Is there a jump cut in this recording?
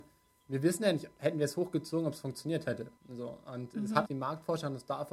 yes; 2 cuts; at 3.0 s, 4.1 s

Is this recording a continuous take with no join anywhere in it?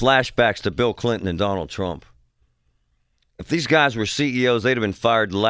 yes; 0 cuts

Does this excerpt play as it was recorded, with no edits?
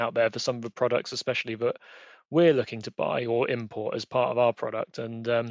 yes; 0 cuts

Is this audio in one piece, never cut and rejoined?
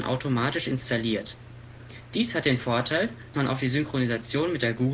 no; 1 cut; at 3.3 s

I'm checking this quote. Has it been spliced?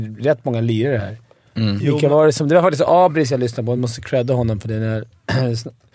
no; 0 cuts

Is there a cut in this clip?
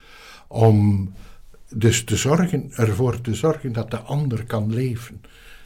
no; 0 cuts

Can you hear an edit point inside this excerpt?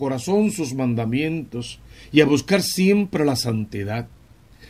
no; 0 cuts

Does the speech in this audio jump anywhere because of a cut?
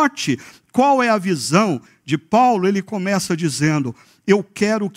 no; 0 cuts

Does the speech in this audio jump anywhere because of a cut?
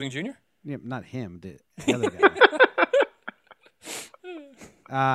yes; 1 cut; at 1.9 s

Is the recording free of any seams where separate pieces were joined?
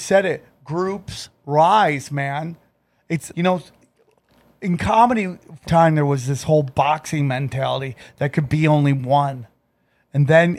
no; 2 cuts; at 3.3 s, 5.7 s

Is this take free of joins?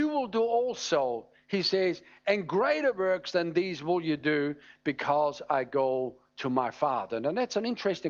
yes; 0 cuts

